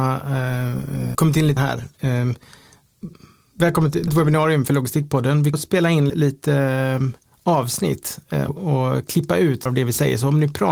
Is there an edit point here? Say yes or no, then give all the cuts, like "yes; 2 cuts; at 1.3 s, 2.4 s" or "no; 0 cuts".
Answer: yes; 7 cuts; at 1.1 s, 1.6 s, 4.1 s, 5.5 s, 6.1 s, 8.5 s, 9.7 s